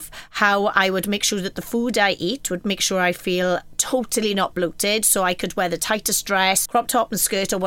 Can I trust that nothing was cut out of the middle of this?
no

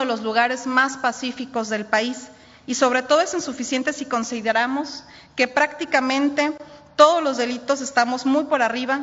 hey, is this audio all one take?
yes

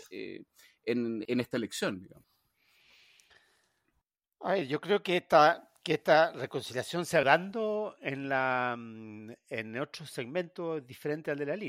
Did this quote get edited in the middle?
yes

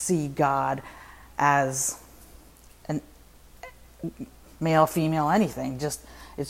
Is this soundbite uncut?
yes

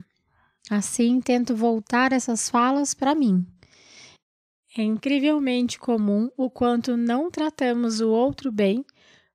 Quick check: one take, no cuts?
yes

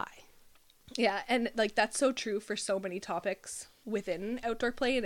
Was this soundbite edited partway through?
no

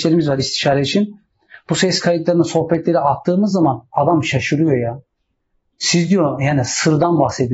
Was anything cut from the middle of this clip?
no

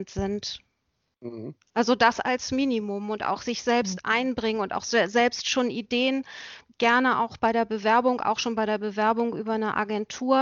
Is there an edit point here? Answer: no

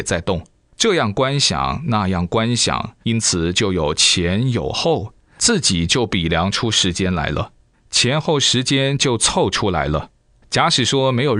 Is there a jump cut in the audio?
yes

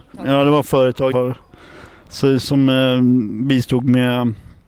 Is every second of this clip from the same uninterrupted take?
no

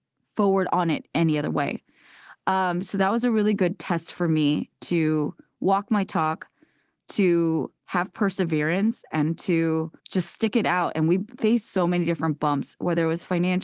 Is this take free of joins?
no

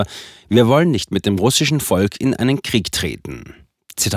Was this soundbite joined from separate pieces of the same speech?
no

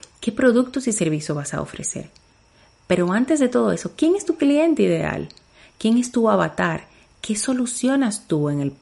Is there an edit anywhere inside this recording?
no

